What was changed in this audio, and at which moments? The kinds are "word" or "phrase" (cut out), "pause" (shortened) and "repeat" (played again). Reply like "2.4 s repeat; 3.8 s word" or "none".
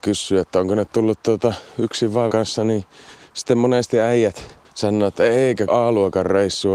2.3 s word; 4.6 s pause; 5.7 s word